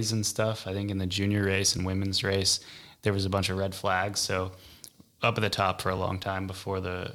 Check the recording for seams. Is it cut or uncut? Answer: uncut